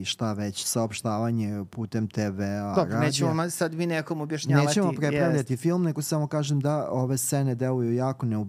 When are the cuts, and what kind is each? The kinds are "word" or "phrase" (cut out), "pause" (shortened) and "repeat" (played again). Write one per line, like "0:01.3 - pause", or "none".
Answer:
none